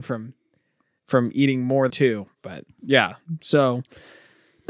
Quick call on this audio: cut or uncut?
cut